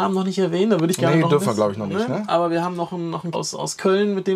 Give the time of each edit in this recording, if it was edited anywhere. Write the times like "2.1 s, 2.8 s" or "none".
3.3 s